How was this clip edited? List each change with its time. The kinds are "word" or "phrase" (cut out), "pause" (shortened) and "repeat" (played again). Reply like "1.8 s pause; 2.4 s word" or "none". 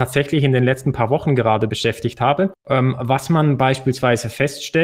1.7 s word; 2.6 s pause

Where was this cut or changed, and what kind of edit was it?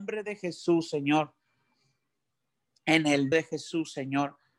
3.3 s word

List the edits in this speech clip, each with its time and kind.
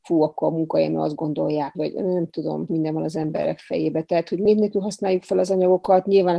1.7 s word; 2.7 s word

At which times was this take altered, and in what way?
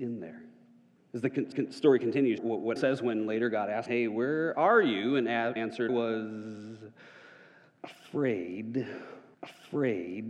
1.0 s pause; 1.5 s repeat; 2.4 s phrase; 2.8 s word; 3.9 s word; 5.6 s word; 5.9 s word; 9.3 s repeat

